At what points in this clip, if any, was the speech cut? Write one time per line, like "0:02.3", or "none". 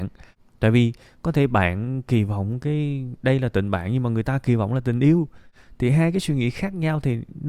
none